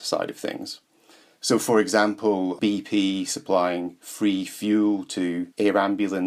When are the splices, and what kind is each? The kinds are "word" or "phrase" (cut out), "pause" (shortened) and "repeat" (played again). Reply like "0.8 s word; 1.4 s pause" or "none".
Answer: none